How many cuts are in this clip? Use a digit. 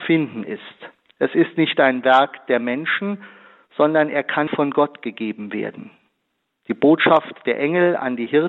1